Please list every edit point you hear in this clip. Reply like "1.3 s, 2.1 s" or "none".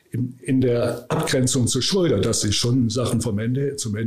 none